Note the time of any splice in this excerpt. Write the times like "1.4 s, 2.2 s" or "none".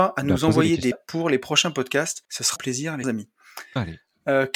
0.9 s, 2.2 s, 2.6 s, 3.0 s